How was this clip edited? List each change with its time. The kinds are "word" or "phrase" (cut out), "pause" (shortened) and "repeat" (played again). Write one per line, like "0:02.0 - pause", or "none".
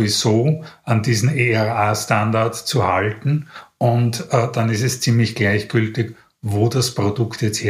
none